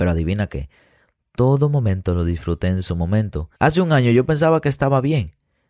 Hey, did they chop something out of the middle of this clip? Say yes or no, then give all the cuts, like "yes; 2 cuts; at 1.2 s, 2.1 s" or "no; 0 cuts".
yes; 1 cut; at 3.5 s